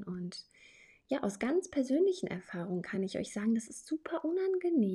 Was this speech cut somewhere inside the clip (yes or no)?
no